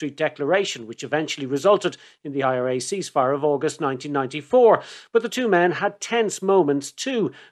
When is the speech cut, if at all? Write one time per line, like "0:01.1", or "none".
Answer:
none